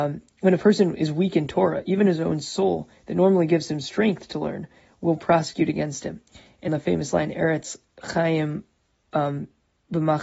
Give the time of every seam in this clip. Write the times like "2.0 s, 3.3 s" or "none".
6.7 s